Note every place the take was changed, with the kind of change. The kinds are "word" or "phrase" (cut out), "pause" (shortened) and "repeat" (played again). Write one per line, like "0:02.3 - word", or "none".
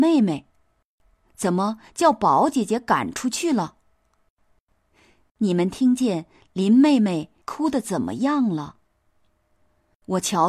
0:07.4 - pause

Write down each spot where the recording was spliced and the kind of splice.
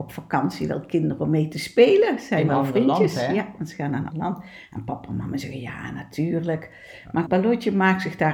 0:02.5 - word
0:04.1 - word
0:07.3 - word

